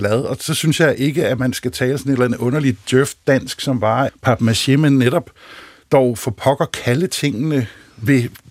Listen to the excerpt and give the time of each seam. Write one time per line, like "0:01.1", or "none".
0:04.1

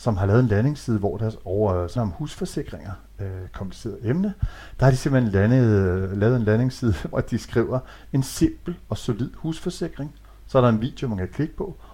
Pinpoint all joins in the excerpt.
0:02.0
0:07.1

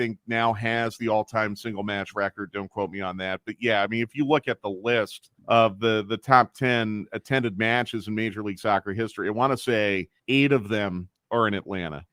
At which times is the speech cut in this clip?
0:05.4
0:10.2

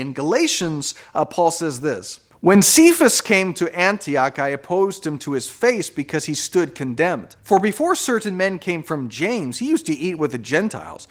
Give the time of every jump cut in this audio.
0:07.4

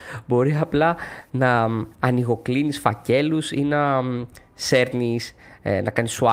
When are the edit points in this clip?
none

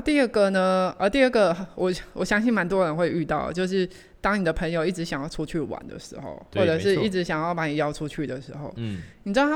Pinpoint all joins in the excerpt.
none

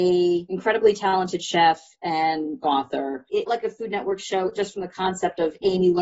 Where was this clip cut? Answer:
0:02.6
0:03.5
0:04.5

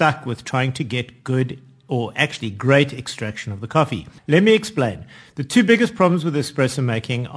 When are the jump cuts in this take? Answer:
0:04.2

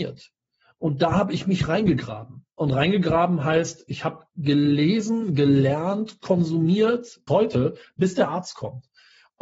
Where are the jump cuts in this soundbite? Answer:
0:02.5
0:04.3
0:07.3

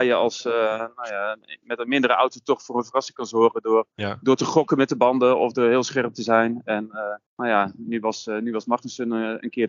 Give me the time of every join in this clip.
0:07.3

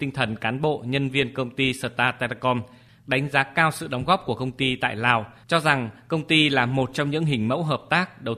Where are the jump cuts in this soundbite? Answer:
none

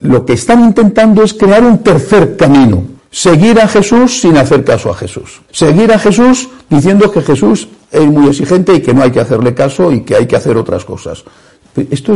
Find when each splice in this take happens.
0:03.0
0:05.5

